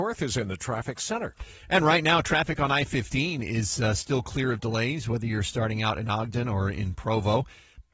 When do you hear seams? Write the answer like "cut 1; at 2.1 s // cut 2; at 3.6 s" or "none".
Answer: none